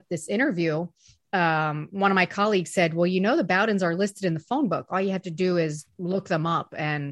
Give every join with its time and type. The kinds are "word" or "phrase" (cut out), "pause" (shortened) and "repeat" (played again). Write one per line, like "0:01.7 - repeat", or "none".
none